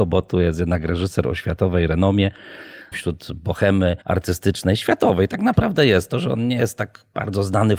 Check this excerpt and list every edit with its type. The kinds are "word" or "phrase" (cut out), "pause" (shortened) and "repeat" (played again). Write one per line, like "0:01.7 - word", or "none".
0:02.9 - word
0:04.0 - pause